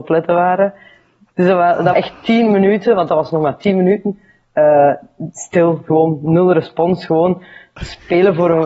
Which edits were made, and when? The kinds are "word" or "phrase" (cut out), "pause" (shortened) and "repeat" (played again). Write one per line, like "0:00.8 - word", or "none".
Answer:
0:01.9 - word